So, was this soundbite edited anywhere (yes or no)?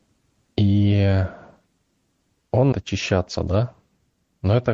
yes